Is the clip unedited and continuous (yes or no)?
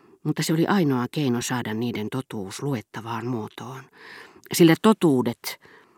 yes